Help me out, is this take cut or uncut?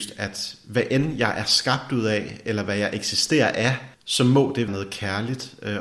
cut